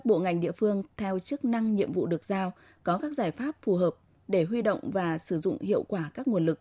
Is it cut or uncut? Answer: uncut